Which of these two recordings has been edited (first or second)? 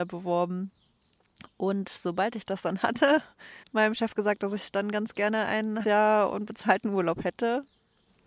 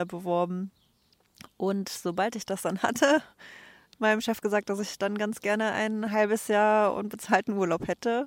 first